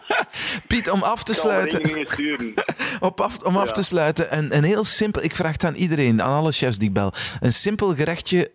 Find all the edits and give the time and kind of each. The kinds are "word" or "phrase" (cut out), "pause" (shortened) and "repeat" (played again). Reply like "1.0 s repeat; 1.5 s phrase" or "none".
4.3 s word